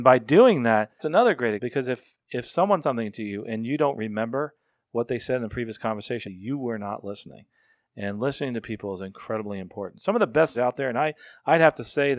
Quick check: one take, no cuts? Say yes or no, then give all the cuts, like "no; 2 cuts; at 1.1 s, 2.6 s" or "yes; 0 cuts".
no; 5 cuts; at 1.0 s, 1.6 s, 2.8 s, 6.2 s, 10.5 s